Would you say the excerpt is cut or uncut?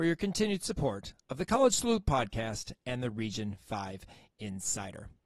uncut